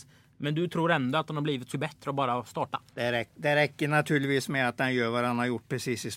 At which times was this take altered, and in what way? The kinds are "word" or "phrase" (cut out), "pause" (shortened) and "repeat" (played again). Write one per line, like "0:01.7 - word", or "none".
0:01.7 - word
0:02.9 - pause